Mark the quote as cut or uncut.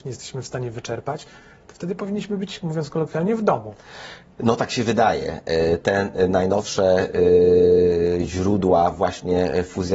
uncut